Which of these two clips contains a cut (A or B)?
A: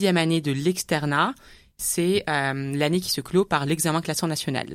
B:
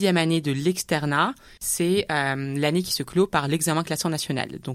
B